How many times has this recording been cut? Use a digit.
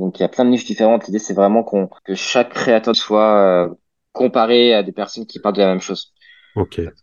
2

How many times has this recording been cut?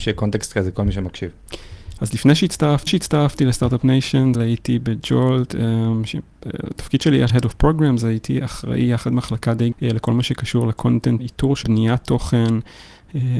7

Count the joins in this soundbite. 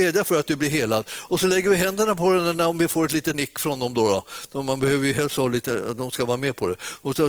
1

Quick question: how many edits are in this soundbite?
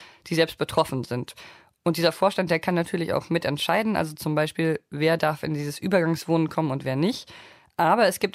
0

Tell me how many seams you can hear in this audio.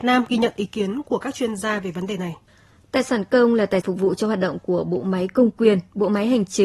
1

